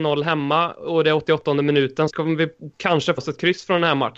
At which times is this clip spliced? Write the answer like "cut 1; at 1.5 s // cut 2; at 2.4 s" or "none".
cut 1; at 2.1 s // cut 2; at 3.2 s